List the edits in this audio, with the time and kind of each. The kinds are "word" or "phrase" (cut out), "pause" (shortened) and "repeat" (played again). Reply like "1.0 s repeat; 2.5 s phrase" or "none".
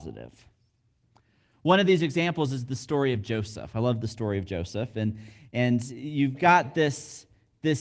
none